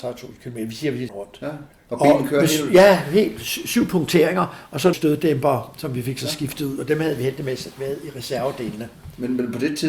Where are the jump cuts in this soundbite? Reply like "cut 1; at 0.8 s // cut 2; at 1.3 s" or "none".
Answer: cut 1; at 1.1 s // cut 2; at 1.7 s // cut 3; at 4.9 s